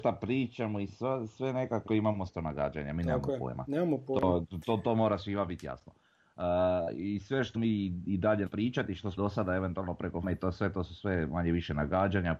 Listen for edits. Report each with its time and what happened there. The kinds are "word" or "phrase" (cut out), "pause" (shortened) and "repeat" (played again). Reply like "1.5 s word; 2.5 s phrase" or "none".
1.9 s word; 2.3 s word; 7.5 s word; 8.5 s word; 9.2 s word; 10.2 s word